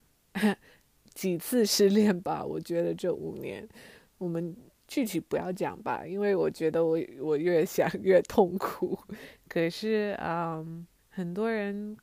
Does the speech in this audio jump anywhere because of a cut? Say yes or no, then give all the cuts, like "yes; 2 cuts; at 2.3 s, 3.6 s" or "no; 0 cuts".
yes; 1 cut; at 11.0 s